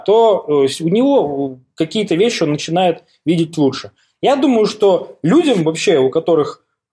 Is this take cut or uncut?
uncut